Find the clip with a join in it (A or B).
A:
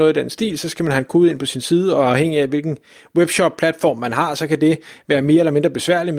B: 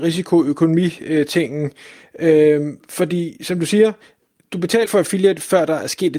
B